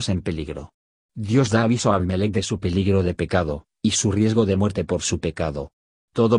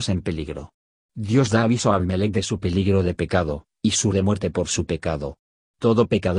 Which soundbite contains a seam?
second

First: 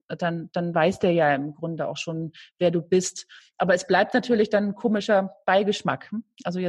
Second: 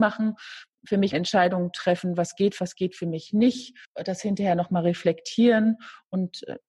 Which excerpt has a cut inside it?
second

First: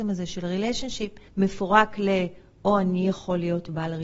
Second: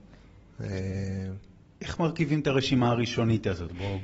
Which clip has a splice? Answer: first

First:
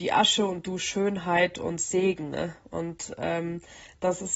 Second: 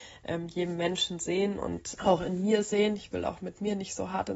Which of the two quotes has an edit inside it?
second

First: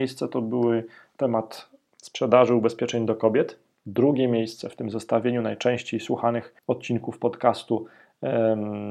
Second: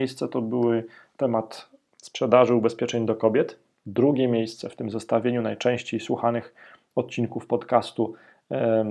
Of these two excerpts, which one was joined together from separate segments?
first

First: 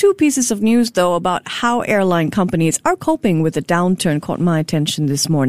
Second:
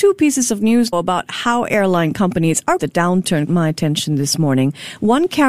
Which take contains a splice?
second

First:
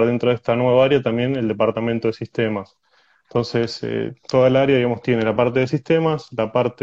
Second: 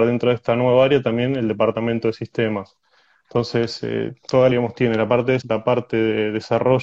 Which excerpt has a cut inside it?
second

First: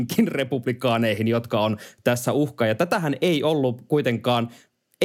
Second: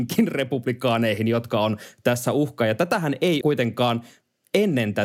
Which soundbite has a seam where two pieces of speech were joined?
second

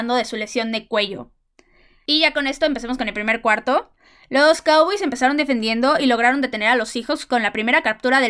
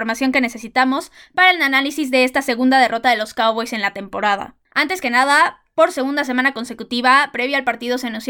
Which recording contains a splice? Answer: second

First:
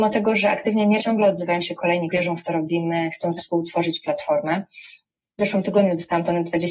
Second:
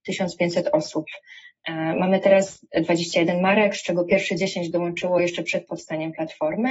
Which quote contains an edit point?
first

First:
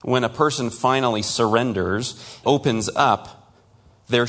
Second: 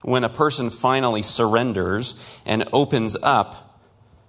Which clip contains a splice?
first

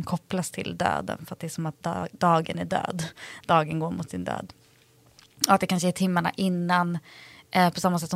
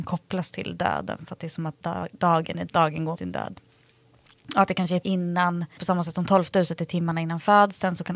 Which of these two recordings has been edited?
second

